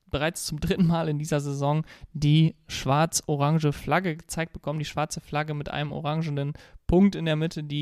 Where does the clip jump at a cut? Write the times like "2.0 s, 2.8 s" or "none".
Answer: none